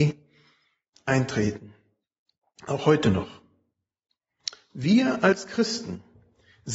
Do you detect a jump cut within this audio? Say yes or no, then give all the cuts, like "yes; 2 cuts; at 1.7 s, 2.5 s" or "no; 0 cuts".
no; 0 cuts